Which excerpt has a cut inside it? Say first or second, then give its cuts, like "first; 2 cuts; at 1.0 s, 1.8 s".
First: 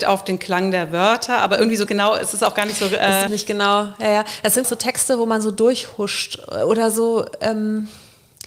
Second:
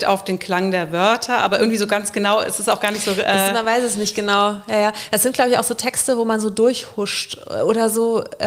first; 3 cuts; at 1.9 s, 3.3 s, 4.6 s